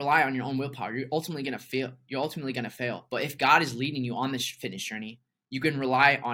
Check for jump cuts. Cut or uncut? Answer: uncut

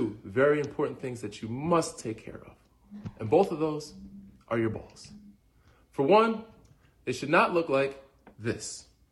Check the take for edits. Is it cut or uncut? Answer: uncut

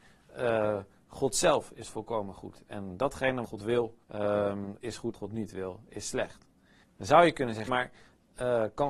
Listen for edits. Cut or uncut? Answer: cut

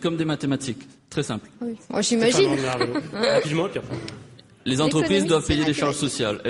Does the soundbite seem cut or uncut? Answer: cut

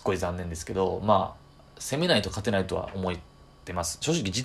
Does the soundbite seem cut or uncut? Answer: uncut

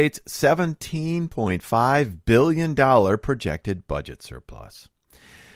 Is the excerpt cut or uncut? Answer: uncut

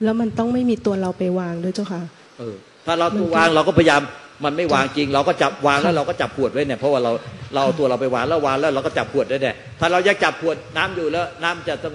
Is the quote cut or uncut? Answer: uncut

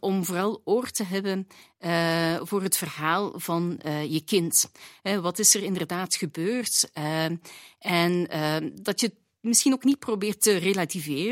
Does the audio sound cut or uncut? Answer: uncut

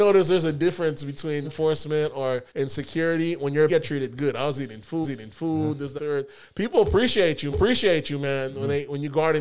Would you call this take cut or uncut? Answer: cut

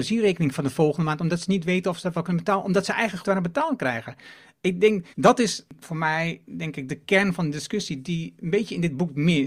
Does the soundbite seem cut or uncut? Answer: cut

